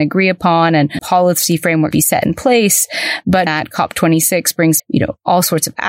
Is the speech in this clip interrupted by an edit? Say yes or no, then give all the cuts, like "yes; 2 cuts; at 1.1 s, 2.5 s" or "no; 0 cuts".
yes; 4 cuts; at 1.0 s, 1.9 s, 3.5 s, 4.8 s